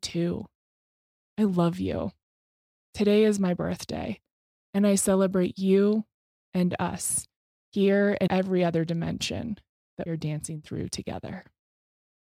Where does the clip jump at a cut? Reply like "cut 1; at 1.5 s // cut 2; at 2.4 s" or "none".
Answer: cut 1; at 8.3 s // cut 2; at 10.1 s